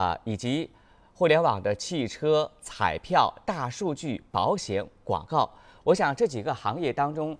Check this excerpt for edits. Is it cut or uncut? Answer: uncut